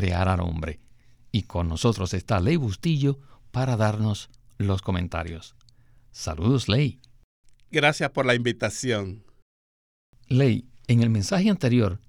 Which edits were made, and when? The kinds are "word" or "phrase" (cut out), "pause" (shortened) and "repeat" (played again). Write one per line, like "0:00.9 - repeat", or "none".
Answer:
none